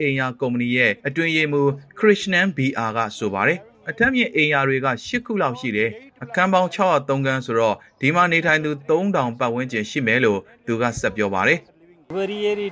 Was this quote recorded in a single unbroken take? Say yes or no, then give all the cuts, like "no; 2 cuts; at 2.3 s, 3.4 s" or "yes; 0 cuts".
no; 2 cuts; at 1.0 s, 11.7 s